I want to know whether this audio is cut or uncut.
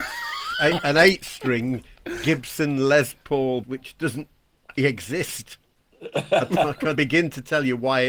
cut